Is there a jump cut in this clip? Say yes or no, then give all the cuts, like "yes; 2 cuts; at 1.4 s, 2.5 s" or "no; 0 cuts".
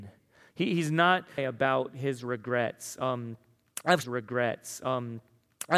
yes; 2 cuts; at 1.4 s, 4.0 s